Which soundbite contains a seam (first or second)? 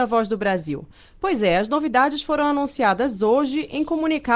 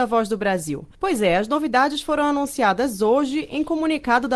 second